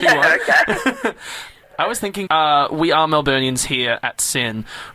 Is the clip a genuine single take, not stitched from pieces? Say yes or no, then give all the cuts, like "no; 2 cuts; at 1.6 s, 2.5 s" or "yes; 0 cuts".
no; 1 cut; at 2.3 s